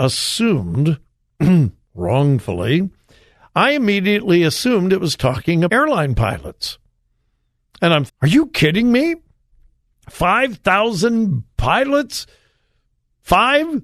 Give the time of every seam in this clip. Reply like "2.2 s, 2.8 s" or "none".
5.7 s, 8.1 s

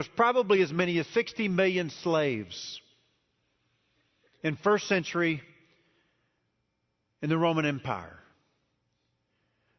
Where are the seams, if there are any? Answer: none

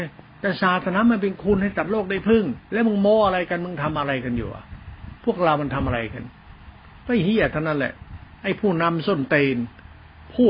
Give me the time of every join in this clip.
2.6 s, 8.4 s

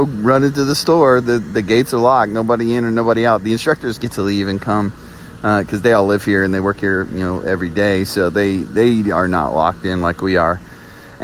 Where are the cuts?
none

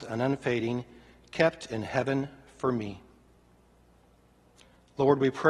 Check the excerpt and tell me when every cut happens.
none

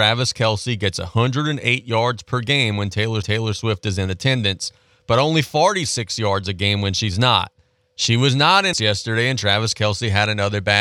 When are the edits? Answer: 3.2 s, 8.7 s

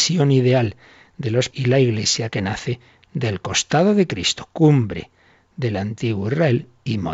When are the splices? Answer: 1.5 s

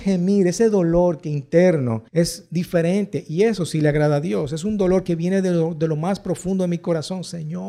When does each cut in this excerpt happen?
2.1 s

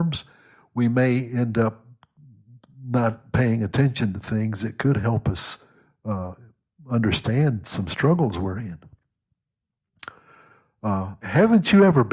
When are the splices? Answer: none

